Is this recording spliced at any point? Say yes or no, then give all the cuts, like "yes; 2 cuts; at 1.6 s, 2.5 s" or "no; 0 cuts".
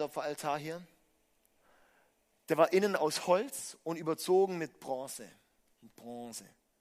no; 0 cuts